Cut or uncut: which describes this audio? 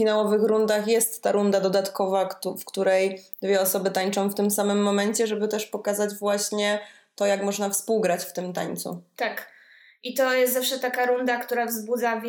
uncut